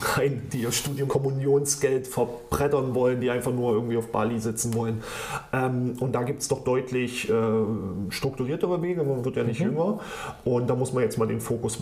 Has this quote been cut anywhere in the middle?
yes; 1 cut; at 1.1 s

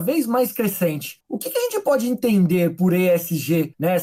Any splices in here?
no; 0 cuts

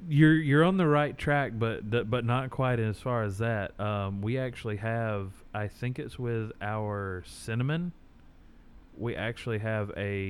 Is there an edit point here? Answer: no; 0 cuts

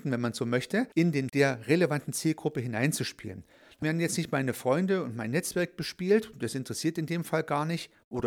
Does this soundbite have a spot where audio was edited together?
yes; 3 cuts; at 0.9 s, 1.3 s, 3.8 s

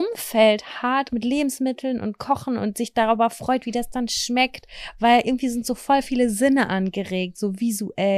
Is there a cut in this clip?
yes; 1 cut; at 1.1 s

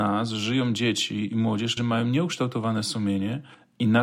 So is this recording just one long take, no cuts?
no; 1 cut; at 1.8 s

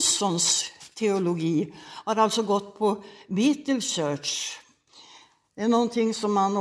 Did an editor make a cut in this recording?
no; 0 cuts

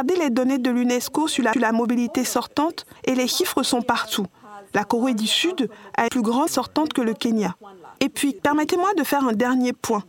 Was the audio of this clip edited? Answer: yes; 6 cuts; at 1.5 s, 3.0 s, 6.1 s, 6.5 s, 8.0 s, 8.4 s

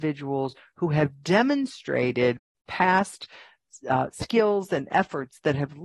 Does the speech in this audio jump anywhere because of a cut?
no; 0 cuts

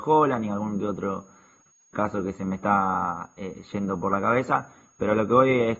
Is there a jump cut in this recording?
no; 0 cuts

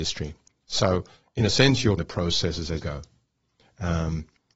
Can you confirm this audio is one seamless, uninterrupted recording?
no; 2 cuts; at 2.0 s, 2.8 s

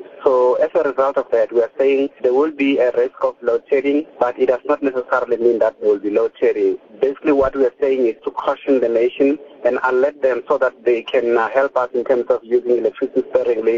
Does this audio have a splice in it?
yes; 2 cuts; at 4.1 s, 8.2 s

